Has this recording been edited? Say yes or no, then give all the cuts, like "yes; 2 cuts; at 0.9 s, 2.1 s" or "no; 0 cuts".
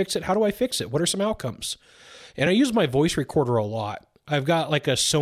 no; 0 cuts